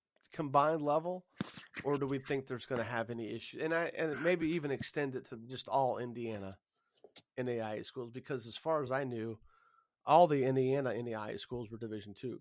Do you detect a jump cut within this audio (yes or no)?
no